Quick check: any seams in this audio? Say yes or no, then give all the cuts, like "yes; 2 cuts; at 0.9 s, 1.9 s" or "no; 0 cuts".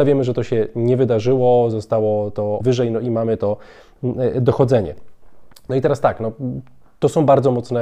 yes; 1 cut; at 2.6 s